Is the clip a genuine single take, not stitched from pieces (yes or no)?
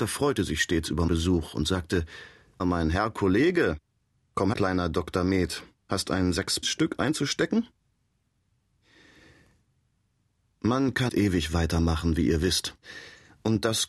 no